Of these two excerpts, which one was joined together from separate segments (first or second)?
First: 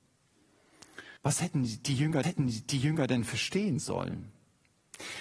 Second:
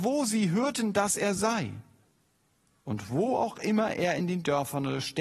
first